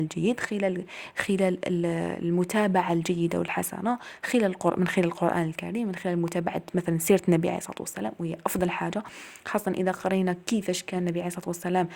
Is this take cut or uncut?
uncut